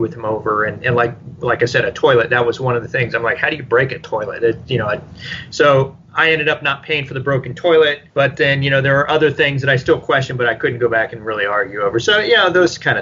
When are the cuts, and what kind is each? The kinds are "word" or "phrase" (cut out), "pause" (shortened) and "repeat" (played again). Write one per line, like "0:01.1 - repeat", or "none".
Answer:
0:08.1 - pause